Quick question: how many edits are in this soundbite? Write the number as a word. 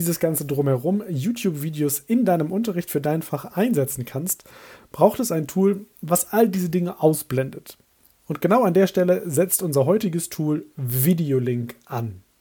zero